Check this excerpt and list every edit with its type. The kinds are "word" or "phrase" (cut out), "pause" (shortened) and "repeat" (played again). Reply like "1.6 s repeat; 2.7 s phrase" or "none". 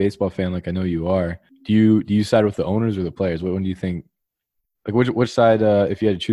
none